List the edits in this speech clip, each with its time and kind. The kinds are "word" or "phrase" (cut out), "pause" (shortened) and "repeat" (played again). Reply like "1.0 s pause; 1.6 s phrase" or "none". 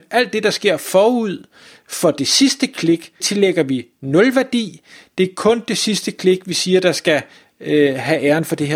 3.2 s word